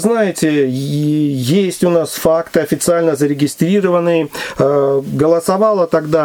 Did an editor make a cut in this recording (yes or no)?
no